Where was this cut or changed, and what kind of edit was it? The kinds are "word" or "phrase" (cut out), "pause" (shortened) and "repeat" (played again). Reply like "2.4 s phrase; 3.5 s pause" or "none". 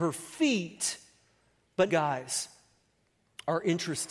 1.9 s phrase